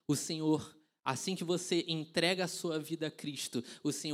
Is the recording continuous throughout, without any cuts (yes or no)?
yes